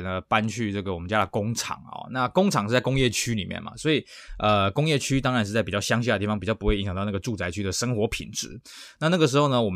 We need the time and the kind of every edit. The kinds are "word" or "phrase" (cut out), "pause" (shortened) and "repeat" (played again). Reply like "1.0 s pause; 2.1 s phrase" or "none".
none

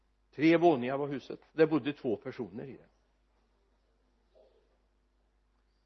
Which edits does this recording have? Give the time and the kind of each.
1.5 s pause

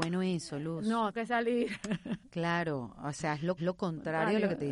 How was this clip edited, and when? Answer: 1.1 s word; 3.6 s repeat

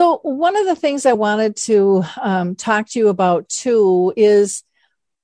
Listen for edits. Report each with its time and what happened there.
none

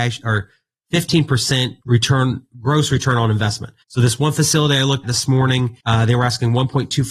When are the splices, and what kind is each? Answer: 1.8 s word; 3.8 s pause; 5.0 s word; 5.8 s pause

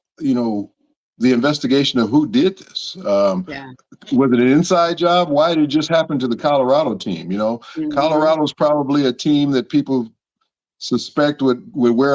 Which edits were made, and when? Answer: none

